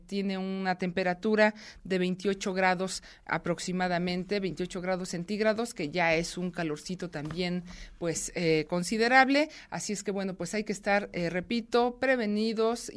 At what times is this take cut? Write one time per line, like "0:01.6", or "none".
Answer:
none